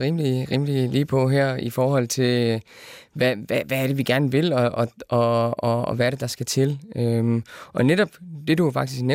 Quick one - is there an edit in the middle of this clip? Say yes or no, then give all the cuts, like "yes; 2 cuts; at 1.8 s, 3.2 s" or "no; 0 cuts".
no; 0 cuts